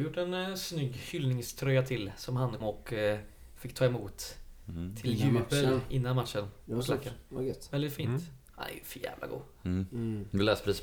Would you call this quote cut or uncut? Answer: cut